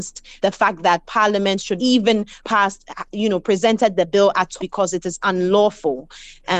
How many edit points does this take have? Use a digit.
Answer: 2